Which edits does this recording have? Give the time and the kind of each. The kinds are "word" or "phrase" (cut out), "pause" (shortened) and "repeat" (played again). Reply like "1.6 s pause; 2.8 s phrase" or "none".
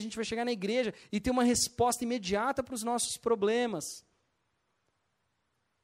none